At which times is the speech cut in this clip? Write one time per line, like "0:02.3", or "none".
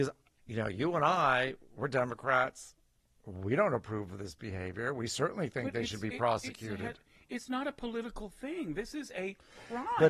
none